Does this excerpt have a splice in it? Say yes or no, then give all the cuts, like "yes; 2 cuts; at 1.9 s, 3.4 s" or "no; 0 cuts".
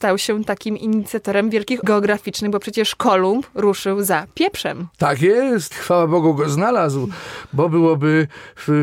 yes; 2 cuts; at 1.8 s, 5.7 s